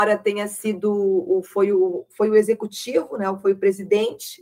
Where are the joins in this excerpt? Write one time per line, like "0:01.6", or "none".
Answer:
none